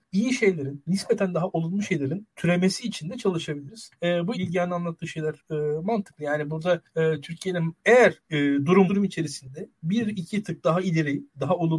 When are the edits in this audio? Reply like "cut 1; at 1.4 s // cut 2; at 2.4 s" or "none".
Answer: cut 1; at 4.3 s // cut 2; at 8.9 s